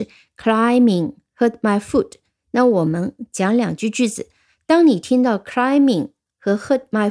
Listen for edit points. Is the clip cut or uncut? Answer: uncut